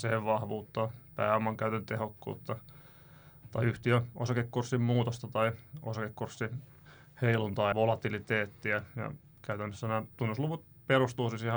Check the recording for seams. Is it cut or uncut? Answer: cut